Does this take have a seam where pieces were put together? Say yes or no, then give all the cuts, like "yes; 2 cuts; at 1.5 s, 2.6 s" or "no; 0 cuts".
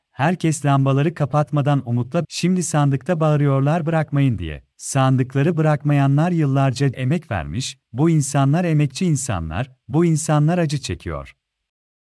yes; 3 cuts; at 2.2 s, 4.7 s, 6.9 s